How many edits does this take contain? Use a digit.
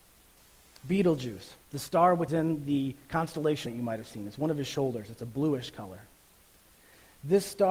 3